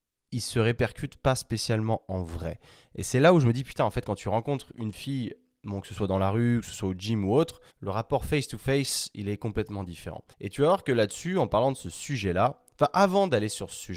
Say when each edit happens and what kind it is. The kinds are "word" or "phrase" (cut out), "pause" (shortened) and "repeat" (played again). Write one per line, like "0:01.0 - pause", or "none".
0:07.7 - pause
0:10.3 - pause